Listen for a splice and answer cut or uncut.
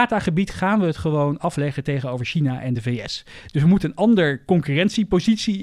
uncut